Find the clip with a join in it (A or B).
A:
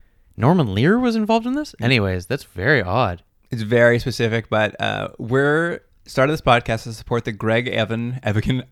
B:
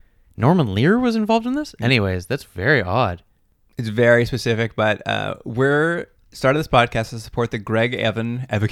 A